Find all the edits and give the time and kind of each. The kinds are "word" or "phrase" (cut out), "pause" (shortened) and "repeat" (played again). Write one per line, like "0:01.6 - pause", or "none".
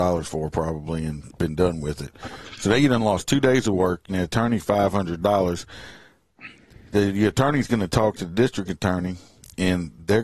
0:04.1 - word

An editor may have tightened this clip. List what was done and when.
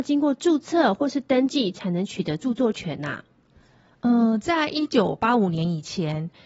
none

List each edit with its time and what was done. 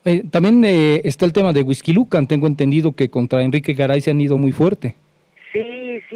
none

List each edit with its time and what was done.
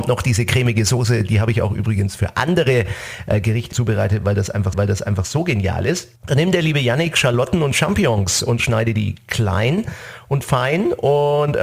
0:03.7 - word
0:04.7 - repeat
0:06.2 - pause

